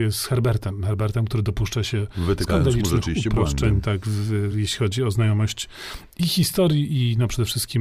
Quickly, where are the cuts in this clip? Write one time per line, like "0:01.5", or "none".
none